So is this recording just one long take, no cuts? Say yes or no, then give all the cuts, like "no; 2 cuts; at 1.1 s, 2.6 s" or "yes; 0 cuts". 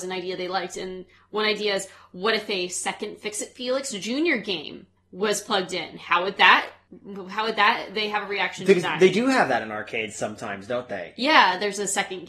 yes; 0 cuts